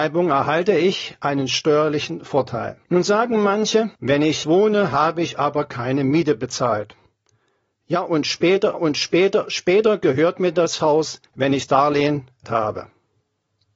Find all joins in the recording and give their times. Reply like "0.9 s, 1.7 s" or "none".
2.8 s, 4.0 s, 4.4 s, 8.7 s, 11.3 s, 11.7 s, 12.4 s